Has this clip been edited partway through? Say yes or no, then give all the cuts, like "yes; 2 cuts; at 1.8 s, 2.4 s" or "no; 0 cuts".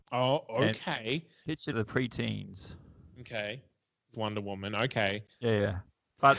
yes; 3 cuts; at 1.7 s, 4.1 s, 5.3 s